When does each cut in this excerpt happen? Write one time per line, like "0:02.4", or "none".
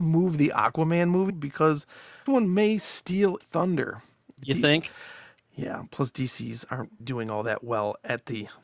0:01.3
0:02.3
0:03.4
0:07.0